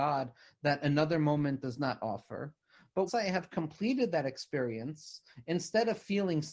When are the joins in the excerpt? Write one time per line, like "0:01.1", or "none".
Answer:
0:03.1